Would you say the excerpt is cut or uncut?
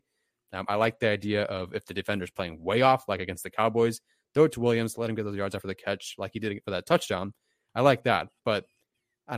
uncut